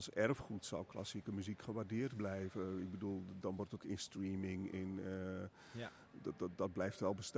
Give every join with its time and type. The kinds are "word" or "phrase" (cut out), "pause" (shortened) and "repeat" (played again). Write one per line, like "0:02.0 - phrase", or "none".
0:03.8 - phrase